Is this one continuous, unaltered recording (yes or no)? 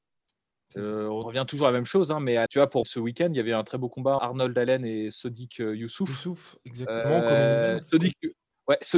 no